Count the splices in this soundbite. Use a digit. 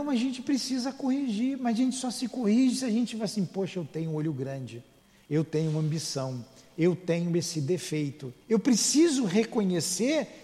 2